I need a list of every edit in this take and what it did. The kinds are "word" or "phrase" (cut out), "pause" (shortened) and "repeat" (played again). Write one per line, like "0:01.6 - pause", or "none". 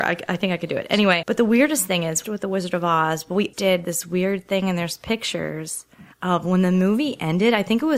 0:01.2 - word
0:02.2 - phrase
0:03.5 - word
0:06.1 - pause